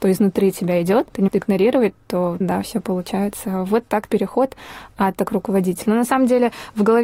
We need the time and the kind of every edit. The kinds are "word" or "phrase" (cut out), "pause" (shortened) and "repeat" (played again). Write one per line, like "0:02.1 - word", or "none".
0:01.3 - word
0:02.4 - word
0:04.1 - phrase
0:05.2 - word